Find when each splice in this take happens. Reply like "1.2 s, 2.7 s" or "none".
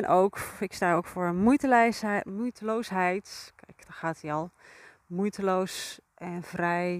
none